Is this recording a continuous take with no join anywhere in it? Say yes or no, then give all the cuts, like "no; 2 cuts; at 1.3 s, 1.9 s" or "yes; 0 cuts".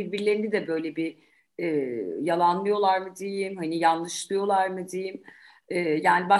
yes; 0 cuts